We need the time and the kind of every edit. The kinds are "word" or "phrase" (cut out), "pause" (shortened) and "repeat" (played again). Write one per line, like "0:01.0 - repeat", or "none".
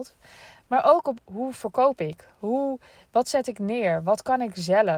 0:01.2 - phrase